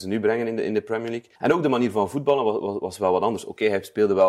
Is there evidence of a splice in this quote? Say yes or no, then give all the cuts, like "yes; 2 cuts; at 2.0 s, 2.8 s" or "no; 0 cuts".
yes; 1 cut; at 1.4 s